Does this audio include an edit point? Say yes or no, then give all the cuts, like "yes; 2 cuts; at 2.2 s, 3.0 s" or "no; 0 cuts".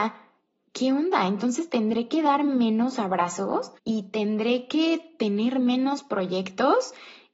yes; 1 cut; at 3.8 s